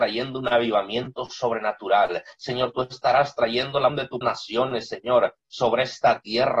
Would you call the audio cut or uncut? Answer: cut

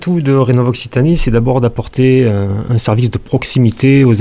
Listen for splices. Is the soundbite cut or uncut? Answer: uncut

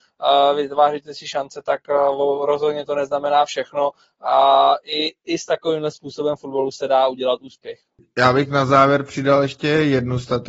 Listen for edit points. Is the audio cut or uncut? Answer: uncut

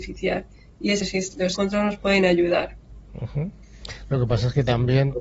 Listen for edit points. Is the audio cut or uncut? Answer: cut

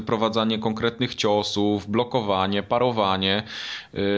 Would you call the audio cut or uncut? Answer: uncut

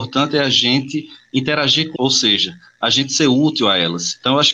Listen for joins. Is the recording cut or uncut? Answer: cut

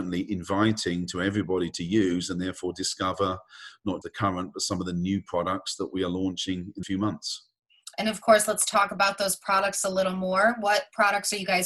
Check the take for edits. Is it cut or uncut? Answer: cut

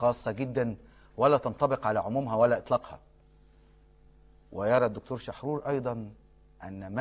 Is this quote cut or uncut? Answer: uncut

